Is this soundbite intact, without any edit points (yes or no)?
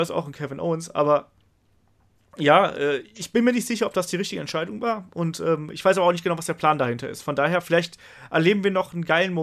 yes